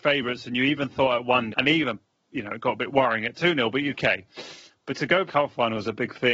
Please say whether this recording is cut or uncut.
cut